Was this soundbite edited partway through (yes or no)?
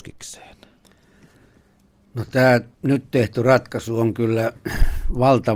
yes